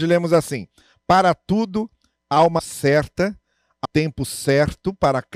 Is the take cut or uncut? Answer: cut